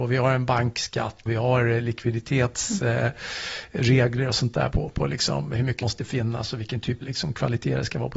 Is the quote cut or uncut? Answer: cut